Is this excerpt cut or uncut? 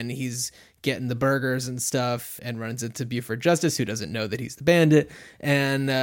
cut